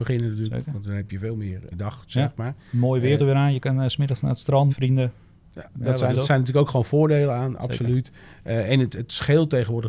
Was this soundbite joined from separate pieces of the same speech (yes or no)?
yes